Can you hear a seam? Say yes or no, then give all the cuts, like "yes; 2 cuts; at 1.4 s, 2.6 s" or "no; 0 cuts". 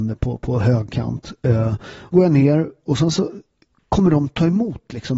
yes; 1 cut; at 2.1 s